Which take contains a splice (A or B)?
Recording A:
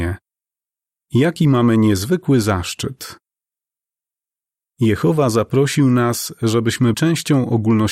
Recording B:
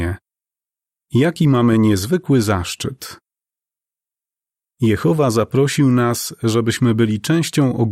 A